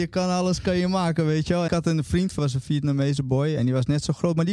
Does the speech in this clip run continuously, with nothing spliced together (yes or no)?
no